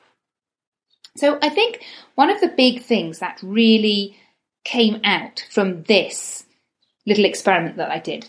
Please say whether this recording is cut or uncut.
uncut